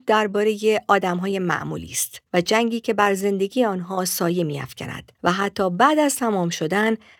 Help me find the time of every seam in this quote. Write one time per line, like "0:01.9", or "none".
0:02.3
0:05.2